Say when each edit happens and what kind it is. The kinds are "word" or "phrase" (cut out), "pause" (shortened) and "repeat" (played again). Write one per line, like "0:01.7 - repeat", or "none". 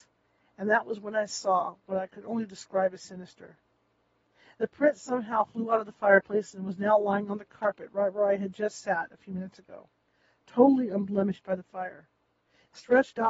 none